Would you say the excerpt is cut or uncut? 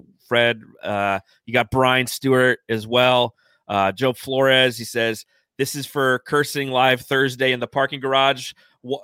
uncut